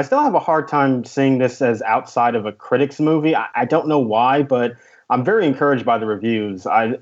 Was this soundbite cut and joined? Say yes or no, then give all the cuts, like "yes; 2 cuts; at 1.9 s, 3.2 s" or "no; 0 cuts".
no; 0 cuts